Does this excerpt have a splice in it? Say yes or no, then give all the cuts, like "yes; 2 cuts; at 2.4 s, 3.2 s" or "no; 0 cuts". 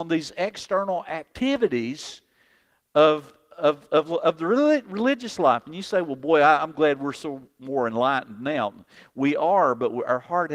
no; 0 cuts